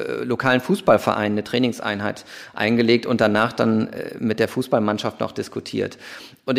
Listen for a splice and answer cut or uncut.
uncut